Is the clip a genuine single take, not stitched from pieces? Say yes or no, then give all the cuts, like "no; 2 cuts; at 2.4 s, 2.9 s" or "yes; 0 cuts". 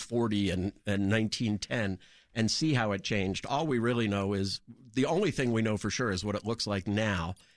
yes; 0 cuts